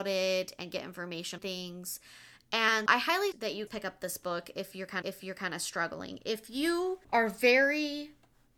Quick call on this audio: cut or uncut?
cut